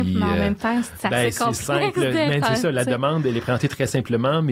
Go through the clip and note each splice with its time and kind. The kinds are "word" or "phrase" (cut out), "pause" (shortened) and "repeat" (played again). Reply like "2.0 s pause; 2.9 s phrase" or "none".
none